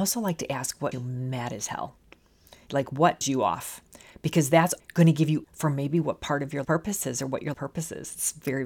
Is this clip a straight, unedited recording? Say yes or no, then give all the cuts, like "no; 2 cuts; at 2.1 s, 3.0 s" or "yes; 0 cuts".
no; 6 cuts; at 0.9 s, 3.2 s, 4.8 s, 5.4 s, 6.6 s, 7.5 s